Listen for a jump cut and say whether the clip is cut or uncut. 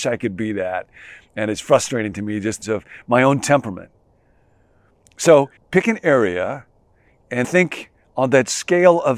cut